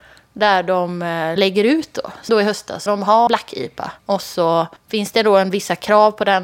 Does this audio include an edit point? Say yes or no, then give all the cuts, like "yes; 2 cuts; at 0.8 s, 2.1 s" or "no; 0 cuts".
yes; 6 cuts; at 1.4 s, 2.3 s, 2.9 s, 3.3 s, 4.0 s, 4.8 s